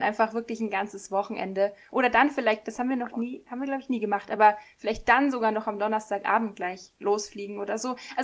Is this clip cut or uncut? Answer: uncut